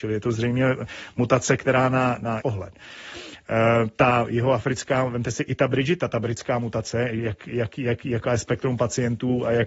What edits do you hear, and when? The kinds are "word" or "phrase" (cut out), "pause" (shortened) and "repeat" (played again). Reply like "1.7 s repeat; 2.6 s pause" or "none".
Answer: 2.4 s phrase